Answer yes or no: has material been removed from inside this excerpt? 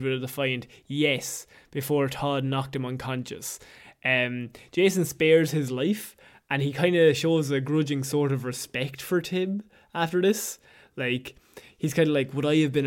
no